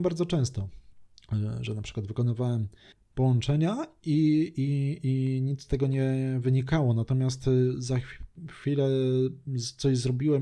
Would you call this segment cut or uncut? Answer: uncut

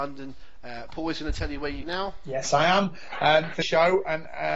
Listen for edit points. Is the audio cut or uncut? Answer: cut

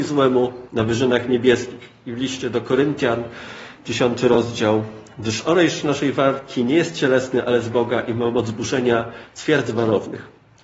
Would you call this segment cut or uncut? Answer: uncut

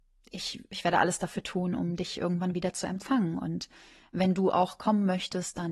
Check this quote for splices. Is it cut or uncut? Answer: uncut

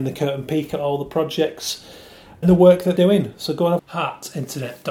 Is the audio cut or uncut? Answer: cut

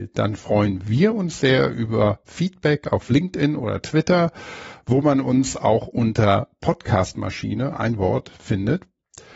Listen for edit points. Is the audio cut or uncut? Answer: uncut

